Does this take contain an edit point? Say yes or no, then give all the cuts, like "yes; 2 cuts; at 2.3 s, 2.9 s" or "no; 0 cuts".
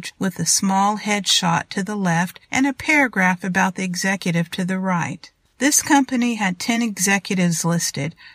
no; 0 cuts